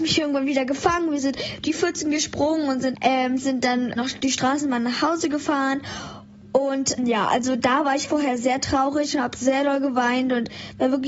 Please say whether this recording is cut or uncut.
cut